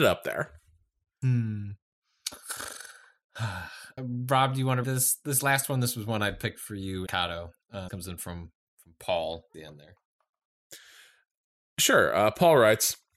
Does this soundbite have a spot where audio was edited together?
yes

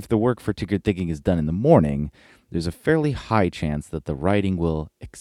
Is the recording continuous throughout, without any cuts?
yes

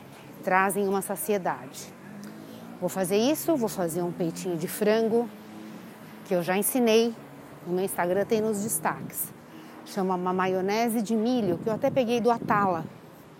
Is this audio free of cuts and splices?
yes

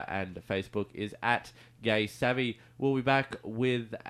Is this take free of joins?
yes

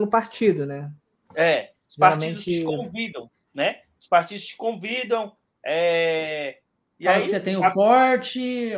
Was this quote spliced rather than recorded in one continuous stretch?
yes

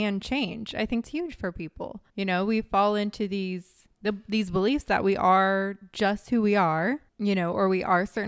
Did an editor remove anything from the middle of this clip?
yes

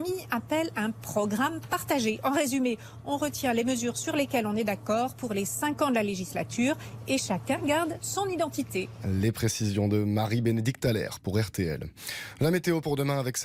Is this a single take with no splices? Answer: yes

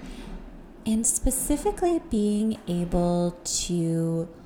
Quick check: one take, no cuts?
yes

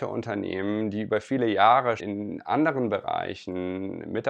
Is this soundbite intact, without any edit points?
no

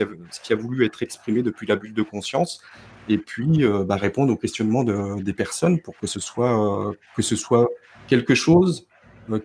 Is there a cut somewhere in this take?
no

